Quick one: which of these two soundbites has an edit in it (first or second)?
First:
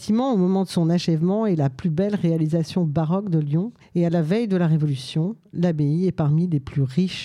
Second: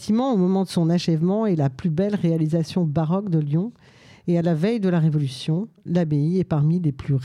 first